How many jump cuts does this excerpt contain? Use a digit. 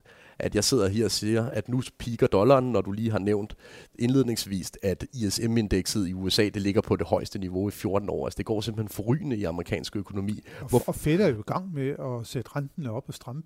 0